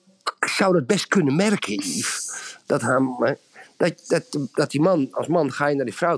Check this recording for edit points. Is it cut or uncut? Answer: uncut